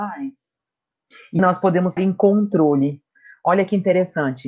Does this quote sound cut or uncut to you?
cut